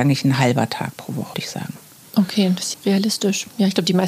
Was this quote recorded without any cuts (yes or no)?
no